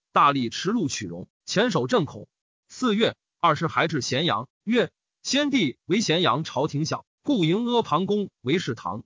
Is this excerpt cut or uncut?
uncut